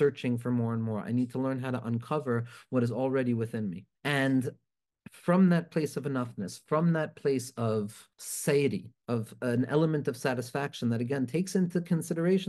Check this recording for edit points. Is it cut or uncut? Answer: cut